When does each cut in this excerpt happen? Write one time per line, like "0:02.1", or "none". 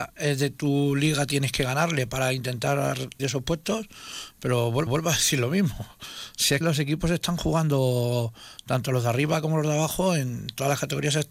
0:03.2
0:04.9
0:06.6